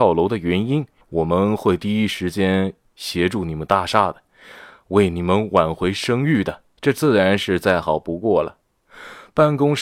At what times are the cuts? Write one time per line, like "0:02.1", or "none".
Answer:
0:01.0